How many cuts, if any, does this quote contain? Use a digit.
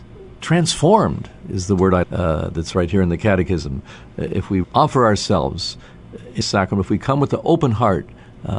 3